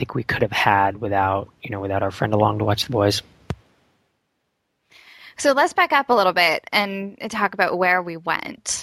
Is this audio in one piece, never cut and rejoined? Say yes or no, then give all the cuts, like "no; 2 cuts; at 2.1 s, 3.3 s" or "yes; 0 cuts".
no; 1 cut; at 1.6 s